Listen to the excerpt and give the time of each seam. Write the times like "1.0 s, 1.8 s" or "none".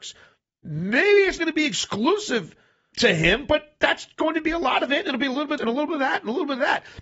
1.4 s, 2.9 s, 5.6 s